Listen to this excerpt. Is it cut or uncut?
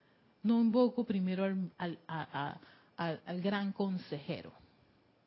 cut